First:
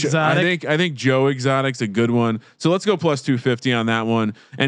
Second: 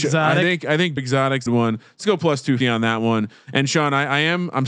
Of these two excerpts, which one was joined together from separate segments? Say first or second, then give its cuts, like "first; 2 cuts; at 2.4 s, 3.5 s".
second; 4 cuts; at 1.0 s, 1.5 s, 2.0 s, 2.6 s